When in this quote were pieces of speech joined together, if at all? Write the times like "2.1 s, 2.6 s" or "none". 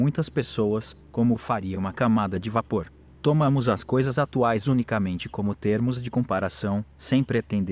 none

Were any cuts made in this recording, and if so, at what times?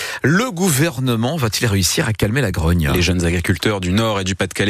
none

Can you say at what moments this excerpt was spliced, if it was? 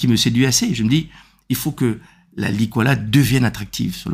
none

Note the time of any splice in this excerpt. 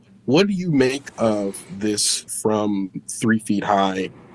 2.3 s

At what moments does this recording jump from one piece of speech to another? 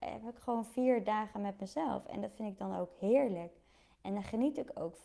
none

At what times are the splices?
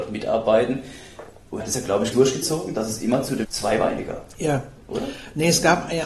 1.6 s, 2.1 s, 3.4 s

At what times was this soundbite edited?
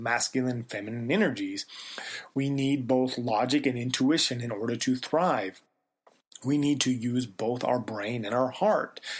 none

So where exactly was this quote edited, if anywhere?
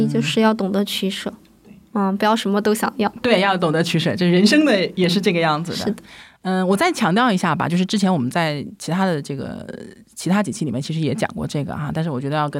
none

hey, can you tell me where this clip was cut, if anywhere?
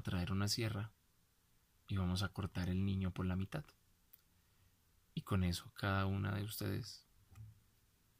none

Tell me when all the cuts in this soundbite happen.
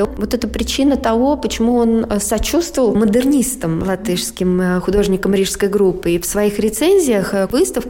none

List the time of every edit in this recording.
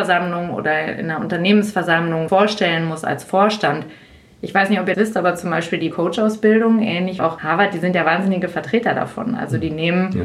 2.3 s, 4.9 s, 5.9 s, 7.2 s

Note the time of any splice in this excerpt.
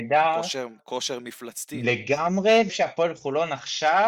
2.7 s

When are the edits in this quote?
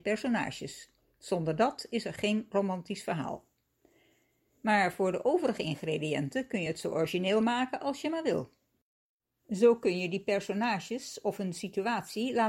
none

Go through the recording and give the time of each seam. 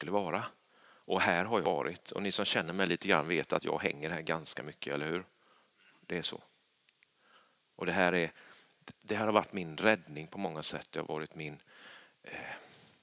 none

